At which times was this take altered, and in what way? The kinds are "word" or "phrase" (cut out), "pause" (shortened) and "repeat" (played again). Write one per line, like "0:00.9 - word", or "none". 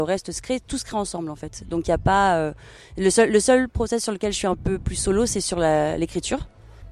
none